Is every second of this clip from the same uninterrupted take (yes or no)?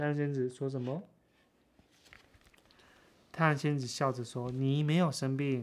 yes